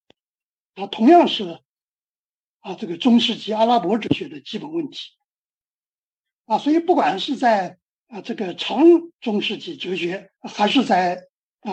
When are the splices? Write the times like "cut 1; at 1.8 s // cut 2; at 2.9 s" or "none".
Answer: cut 1; at 7.9 s // cut 2; at 9.1 s // cut 3; at 10.3 s